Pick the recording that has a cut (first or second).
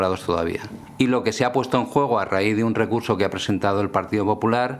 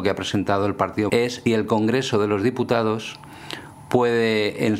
second